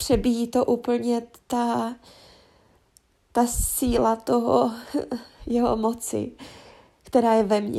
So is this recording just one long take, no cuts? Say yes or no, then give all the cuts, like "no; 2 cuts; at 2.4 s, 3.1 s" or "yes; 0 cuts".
yes; 0 cuts